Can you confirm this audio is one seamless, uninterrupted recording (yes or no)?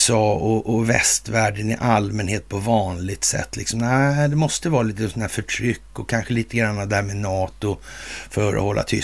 yes